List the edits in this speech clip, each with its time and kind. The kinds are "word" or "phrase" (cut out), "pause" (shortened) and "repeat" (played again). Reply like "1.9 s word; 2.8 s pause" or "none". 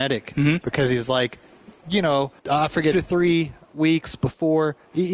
2.4 s pause; 2.9 s phrase